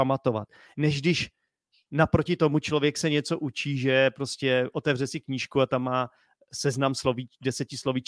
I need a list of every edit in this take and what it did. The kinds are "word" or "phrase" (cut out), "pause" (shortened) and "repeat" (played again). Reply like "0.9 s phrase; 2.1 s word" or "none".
none